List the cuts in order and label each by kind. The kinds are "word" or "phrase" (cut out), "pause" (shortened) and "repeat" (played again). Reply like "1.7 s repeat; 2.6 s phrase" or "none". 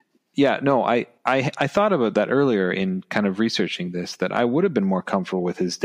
1.2 s pause